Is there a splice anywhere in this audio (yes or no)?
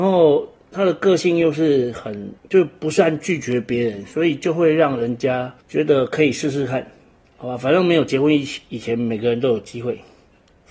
yes